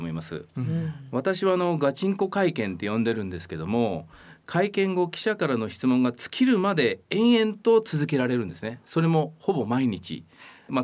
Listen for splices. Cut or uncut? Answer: uncut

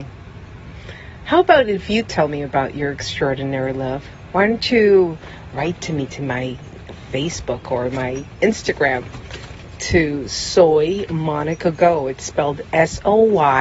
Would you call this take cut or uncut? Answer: uncut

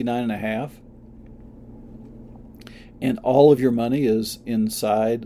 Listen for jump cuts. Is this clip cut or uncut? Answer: uncut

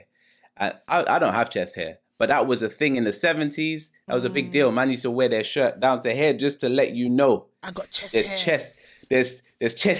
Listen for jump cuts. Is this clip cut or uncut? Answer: uncut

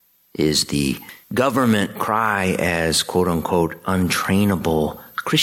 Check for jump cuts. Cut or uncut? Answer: cut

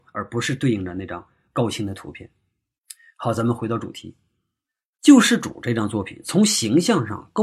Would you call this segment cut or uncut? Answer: uncut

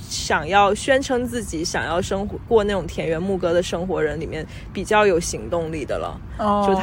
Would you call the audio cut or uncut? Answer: cut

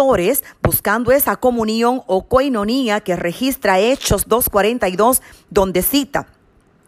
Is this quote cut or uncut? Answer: uncut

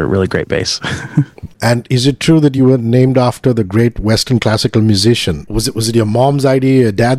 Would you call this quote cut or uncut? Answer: uncut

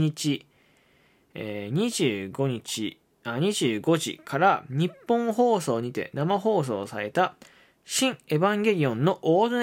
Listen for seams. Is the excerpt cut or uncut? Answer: uncut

